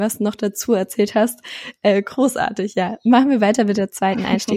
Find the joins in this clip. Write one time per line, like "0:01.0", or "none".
none